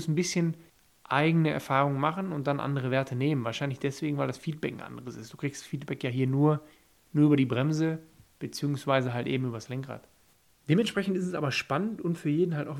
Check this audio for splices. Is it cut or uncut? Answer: uncut